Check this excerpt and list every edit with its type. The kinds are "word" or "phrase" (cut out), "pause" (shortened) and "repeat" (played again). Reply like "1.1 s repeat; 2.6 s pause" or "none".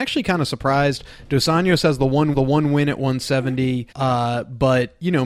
2.3 s repeat; 3.9 s pause